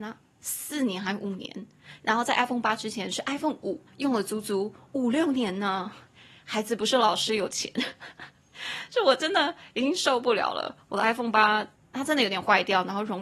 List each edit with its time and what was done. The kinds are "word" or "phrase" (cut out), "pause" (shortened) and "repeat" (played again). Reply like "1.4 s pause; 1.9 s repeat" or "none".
3.9 s pause; 11.8 s pause